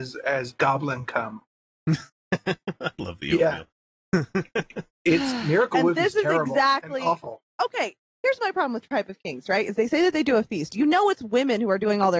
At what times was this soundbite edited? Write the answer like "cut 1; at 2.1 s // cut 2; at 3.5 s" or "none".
none